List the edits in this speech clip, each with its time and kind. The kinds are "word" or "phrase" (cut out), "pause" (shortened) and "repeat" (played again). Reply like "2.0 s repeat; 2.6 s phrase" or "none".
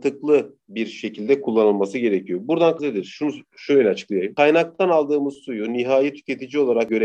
2.8 s word